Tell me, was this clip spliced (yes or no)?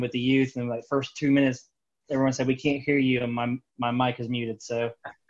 no